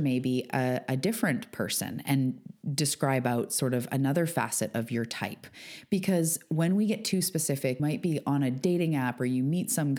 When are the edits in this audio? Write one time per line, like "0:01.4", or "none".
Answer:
0:07.8

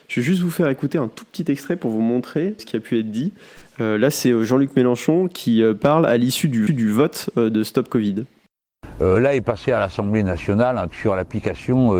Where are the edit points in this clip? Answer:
0:02.6
0:06.7
0:10.9

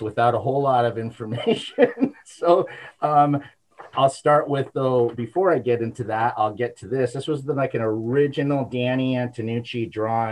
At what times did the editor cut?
none

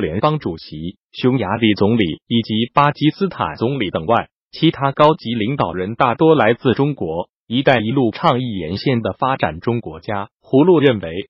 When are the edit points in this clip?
0:01.0
0:10.3

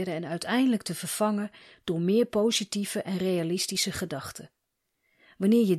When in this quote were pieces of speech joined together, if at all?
none

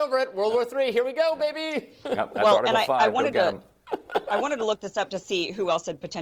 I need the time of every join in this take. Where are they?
none

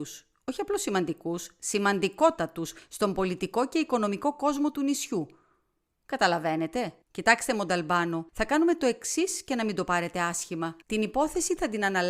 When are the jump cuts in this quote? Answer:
0:07.0
0:08.3
0:10.8

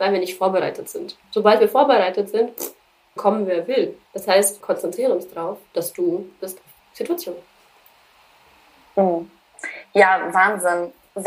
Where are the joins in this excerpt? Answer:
0:01.2
0:03.2
0:04.0
0:04.6
0:06.4
0:06.8

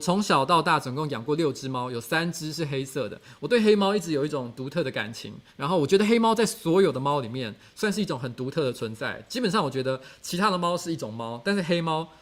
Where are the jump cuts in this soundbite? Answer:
0:05.5

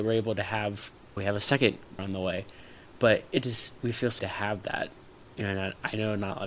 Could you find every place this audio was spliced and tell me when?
0:01.2
0:02.0
0:04.2

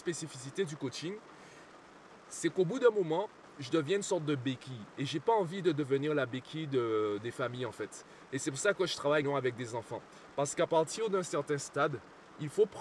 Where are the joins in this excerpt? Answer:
0:09.2

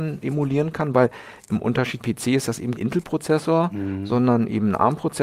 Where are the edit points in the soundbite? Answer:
0:02.0
0:02.7

